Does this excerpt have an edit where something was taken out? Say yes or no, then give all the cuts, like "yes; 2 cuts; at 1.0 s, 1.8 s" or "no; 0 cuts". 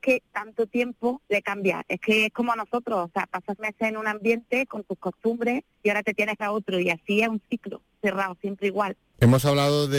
yes; 3 cuts; at 1.2 s, 3.6 s, 6.4 s